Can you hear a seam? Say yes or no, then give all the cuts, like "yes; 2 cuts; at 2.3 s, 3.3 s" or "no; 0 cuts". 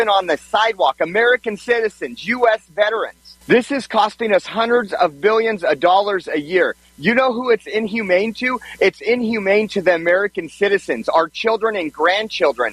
yes; 1 cut; at 3.4 s